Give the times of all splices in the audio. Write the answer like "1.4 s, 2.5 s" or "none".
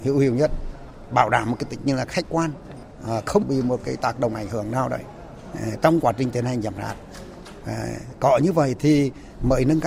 none

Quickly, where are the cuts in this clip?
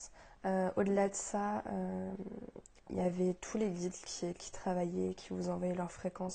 none

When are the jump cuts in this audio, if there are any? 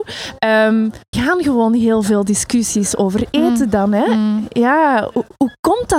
1.1 s

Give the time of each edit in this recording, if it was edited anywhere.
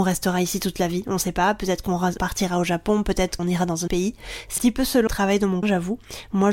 2.2 s, 3.4 s, 3.9 s, 4.6 s, 5.1 s, 5.6 s

